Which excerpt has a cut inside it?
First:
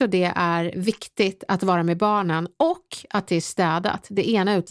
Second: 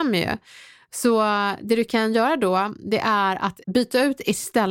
second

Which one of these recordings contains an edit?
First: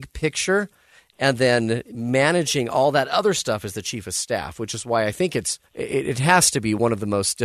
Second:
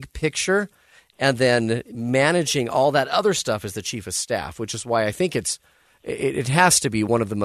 first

